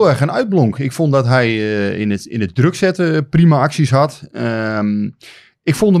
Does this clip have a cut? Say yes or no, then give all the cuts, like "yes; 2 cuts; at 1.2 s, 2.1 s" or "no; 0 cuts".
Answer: no; 0 cuts